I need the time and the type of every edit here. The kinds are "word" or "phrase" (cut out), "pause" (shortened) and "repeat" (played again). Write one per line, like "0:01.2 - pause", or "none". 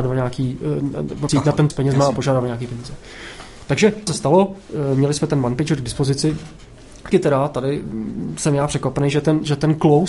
0:01.3 - word
0:01.7 - word
0:04.1 - word
0:07.1 - word